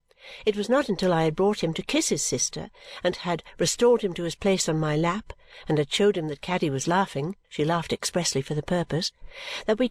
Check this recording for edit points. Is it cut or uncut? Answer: cut